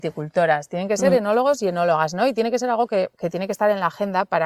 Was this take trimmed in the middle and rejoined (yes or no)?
no